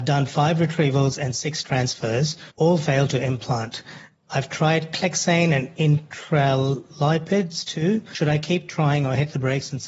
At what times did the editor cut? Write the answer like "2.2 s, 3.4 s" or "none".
2.5 s